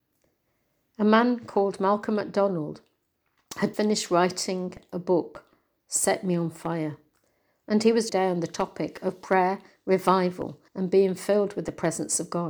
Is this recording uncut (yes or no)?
no